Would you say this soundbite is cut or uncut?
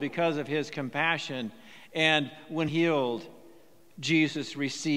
cut